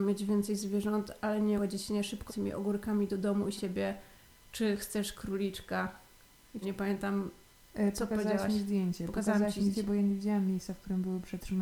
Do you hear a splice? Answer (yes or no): yes